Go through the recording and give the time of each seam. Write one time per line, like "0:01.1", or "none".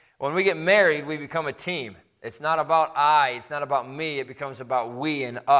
none